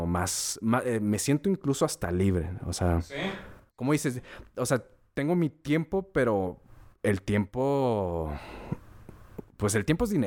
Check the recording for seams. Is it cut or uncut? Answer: uncut